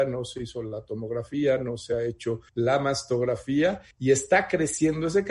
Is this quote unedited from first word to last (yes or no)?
no